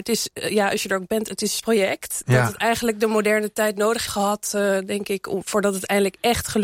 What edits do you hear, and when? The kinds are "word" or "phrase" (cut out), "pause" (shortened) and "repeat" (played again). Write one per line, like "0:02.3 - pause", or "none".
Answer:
0:01.6 - phrase
0:04.1 - word